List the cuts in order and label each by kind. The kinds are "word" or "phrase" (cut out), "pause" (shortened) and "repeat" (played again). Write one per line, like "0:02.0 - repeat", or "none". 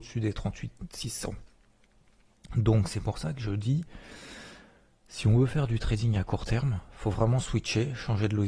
none